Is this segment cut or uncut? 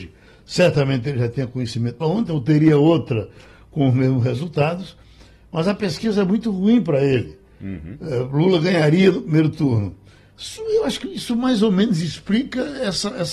cut